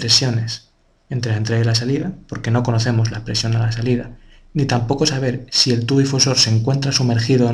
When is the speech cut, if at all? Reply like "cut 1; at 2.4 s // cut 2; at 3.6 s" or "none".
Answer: none